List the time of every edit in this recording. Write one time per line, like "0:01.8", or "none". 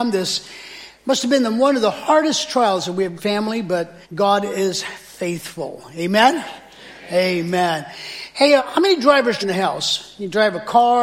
0:03.2
0:04.0
0:08.6
0:09.4